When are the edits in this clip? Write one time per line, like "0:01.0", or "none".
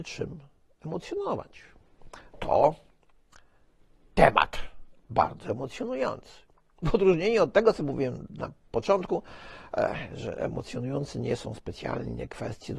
0:02.3